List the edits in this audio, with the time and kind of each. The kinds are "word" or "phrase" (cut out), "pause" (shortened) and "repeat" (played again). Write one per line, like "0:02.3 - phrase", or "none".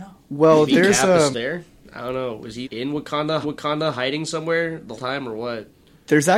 0:01.3 - word
0:02.6 - word
0:03.4 - repeat
0:05.0 - word